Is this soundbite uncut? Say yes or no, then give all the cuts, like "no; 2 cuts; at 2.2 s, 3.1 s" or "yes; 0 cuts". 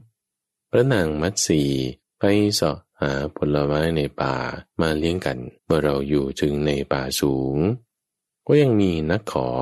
no; 3 cuts; at 2.0 s, 4.7 s, 5.6 s